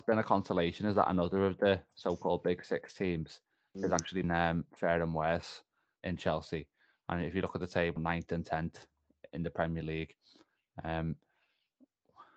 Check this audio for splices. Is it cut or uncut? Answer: cut